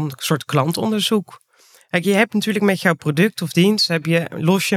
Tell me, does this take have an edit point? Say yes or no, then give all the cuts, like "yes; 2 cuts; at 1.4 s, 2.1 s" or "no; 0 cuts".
no; 0 cuts